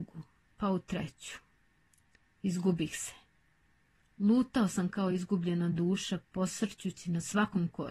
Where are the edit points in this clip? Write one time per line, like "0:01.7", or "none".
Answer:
none